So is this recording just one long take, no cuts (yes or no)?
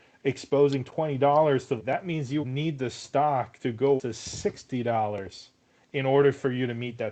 no